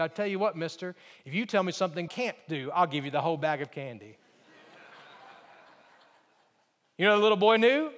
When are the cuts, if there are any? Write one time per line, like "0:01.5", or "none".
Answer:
0:02.1